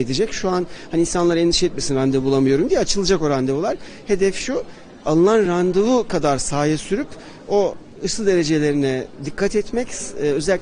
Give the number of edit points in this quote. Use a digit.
0